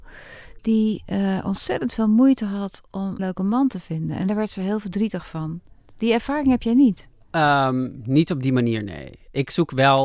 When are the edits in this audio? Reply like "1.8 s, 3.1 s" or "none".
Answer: 3.2 s